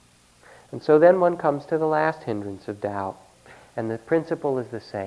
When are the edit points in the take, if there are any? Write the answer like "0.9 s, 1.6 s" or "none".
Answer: none